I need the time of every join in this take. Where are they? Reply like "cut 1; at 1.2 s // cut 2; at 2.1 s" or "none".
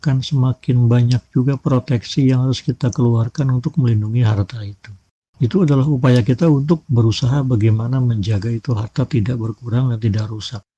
cut 1; at 5.2 s